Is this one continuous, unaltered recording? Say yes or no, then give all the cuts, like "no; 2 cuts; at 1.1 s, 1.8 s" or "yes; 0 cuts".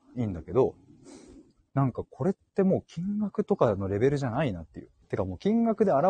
no; 1 cut; at 5.0 s